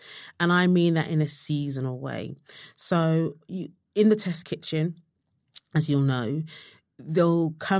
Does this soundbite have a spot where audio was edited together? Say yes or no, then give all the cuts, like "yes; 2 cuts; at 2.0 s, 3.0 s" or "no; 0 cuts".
no; 0 cuts